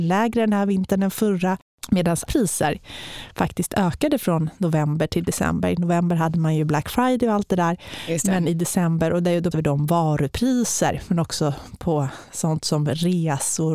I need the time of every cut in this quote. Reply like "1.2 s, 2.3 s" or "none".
2.3 s, 9.5 s